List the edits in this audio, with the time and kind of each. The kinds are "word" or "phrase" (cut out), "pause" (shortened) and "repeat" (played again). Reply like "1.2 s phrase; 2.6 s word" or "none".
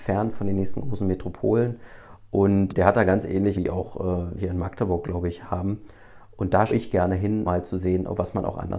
2.7 s word; 3.5 s word; 4.4 s word; 6.7 s word; 7.4 s word